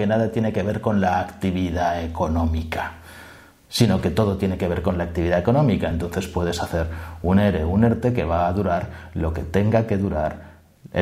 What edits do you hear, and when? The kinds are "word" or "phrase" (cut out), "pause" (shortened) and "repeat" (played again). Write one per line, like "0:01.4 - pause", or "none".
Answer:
none

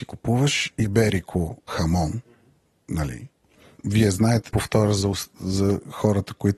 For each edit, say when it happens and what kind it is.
0:01.7 - word
0:03.8 - word
0:04.5 - phrase

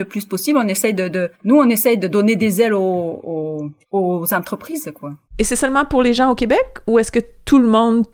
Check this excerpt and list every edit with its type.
0:01.3 - pause
0:03.8 - pause
0:05.2 - pause

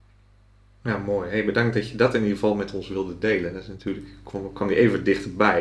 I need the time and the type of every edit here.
none

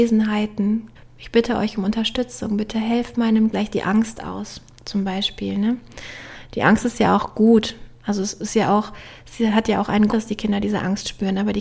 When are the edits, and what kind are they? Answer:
0:01.0 - pause
0:03.5 - word
0:10.1 - word

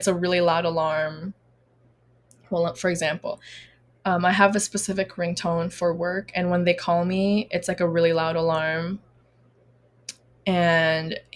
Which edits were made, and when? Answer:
none

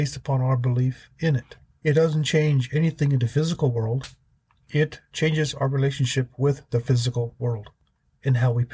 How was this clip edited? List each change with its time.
none

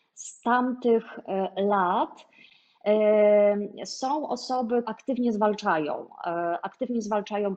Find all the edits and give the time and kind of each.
0:04.8 - word

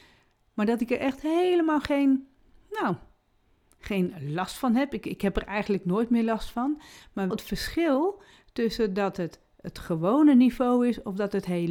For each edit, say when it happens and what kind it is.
0:07.3 - word

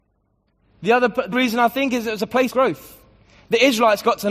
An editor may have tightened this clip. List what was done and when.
0:01.3 - word
0:02.5 - word

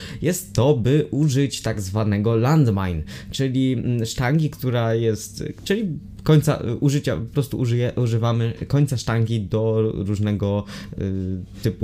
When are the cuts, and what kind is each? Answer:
none

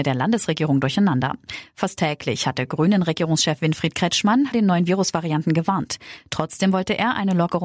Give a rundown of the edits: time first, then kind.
0:04.5 - word

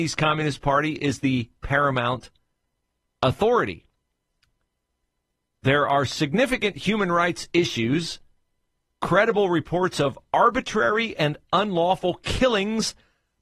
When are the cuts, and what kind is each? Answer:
none

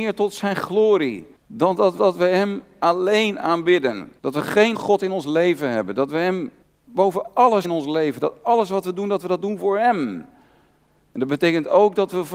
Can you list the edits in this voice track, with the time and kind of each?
0:01.4 - pause
0:02.0 - repeat
0:04.2 - pause
0:04.7 - word
0:06.6 - pause
0:07.6 - word

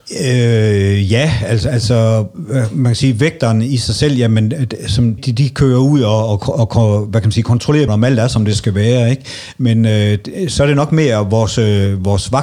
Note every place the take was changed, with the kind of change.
0:05.2 - word
0:07.9 - word

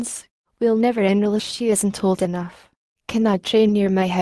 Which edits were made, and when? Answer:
0:01.4 - phrase

